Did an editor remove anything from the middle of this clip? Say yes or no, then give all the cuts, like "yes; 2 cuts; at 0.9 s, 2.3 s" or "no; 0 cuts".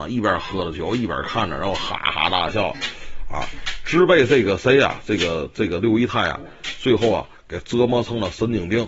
no; 0 cuts